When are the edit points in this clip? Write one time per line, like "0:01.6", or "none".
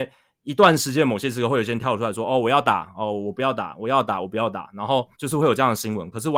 0:05.1